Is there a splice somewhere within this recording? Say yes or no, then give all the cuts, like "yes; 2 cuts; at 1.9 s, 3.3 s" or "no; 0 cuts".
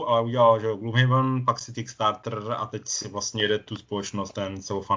yes; 1 cut; at 1.7 s